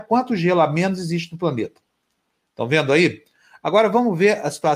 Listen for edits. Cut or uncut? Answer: uncut